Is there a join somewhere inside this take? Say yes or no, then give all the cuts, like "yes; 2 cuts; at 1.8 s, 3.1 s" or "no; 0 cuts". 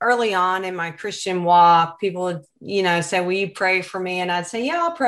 no; 0 cuts